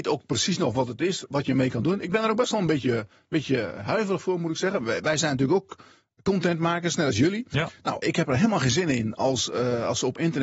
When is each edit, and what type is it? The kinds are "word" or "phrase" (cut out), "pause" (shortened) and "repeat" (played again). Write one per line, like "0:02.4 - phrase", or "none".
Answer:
0:08.0 - word